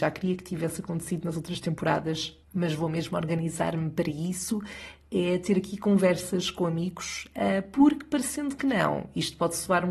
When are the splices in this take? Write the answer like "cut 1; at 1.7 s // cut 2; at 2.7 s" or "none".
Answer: cut 1; at 2.5 s